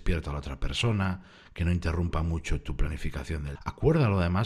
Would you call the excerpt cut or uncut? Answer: cut